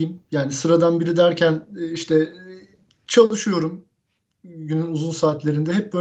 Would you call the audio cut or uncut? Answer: uncut